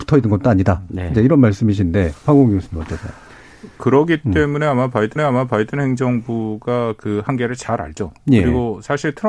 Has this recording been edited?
yes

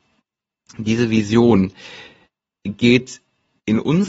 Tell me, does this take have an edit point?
no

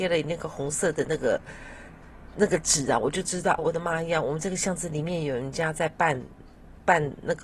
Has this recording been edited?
yes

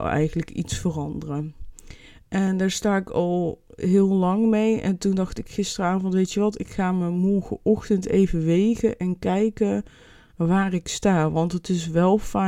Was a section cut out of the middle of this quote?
no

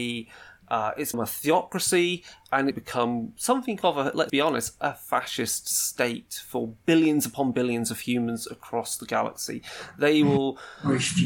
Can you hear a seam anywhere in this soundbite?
yes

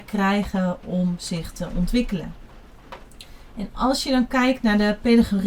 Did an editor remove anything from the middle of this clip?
no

